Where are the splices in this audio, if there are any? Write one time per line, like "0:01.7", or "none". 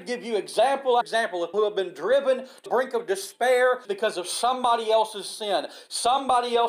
0:01.0
0:01.5
0:02.7
0:03.8